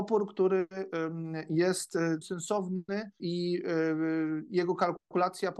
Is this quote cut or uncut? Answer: cut